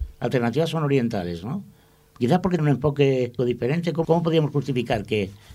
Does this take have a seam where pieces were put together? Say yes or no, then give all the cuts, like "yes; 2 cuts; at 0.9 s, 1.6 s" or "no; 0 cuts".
yes; 3 cuts; at 2.6 s, 3.4 s, 4.0 s